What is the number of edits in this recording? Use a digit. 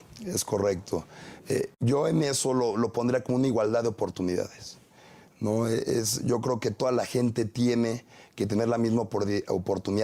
1